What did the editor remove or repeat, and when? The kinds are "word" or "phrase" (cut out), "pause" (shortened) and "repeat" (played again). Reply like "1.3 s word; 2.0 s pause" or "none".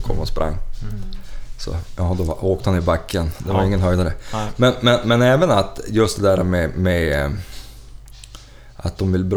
none